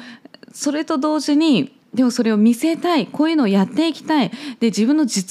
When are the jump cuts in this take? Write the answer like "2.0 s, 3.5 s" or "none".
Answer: 1.8 s